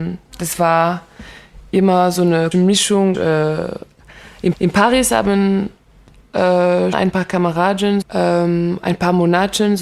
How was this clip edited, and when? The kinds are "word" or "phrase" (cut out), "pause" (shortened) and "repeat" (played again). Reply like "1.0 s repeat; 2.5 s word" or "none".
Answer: 2.5 s word; 3.1 s word; 4.5 s repeat; 6.9 s word; 8.0 s word